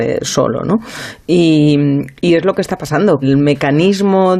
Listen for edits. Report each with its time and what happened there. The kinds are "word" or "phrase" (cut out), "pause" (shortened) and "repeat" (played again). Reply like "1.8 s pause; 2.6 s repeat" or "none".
3.2 s word